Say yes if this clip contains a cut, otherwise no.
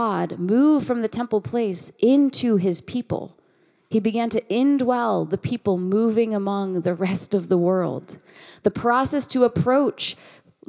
no